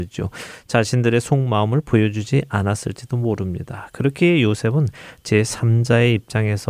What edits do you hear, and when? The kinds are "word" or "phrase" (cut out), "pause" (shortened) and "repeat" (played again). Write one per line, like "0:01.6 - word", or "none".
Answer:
none